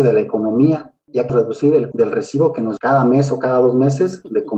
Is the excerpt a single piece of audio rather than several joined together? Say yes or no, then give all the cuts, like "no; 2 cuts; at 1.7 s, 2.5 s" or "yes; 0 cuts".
no; 3 cuts; at 1.3 s, 1.9 s, 2.8 s